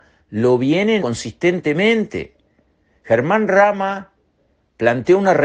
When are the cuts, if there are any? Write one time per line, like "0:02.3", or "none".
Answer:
0:01.0